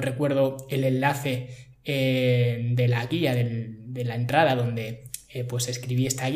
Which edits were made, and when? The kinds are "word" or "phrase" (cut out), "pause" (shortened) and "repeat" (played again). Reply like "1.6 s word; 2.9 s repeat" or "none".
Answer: none